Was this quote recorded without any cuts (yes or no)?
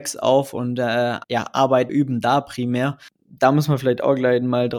no